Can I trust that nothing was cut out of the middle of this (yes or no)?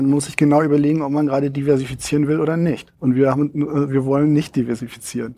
yes